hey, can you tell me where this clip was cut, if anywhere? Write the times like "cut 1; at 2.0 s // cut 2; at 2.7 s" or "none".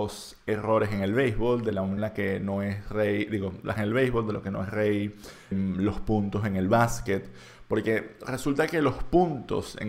cut 1; at 2.0 s // cut 2; at 3.8 s // cut 3; at 5.5 s